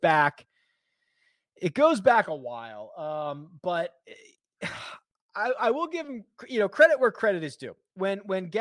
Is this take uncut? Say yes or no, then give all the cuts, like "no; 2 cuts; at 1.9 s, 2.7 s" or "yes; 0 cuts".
yes; 0 cuts